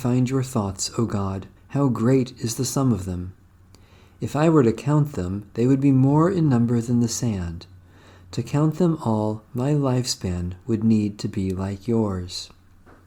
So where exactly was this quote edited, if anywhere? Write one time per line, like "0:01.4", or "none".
0:01.6